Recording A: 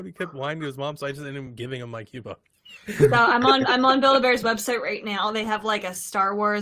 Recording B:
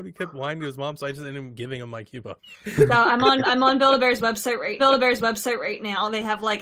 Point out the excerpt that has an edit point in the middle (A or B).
B